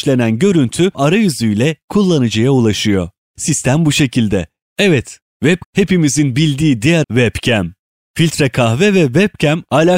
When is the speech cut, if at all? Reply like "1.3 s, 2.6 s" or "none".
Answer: 0.9 s, 5.6 s, 7.0 s